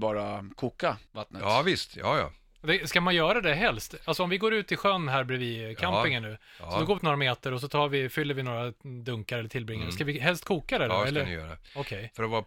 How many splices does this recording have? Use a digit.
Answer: 2